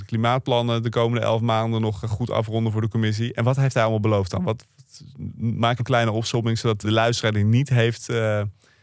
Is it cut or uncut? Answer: cut